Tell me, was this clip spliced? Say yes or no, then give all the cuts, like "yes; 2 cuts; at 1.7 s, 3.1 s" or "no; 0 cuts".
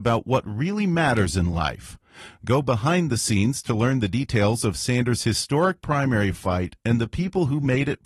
no; 0 cuts